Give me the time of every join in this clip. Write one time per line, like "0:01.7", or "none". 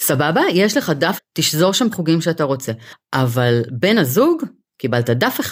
0:01.2
0:01.9